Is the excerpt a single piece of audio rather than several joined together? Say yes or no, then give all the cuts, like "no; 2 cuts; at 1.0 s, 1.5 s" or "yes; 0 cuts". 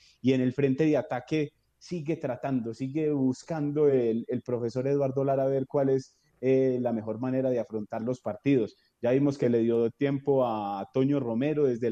yes; 0 cuts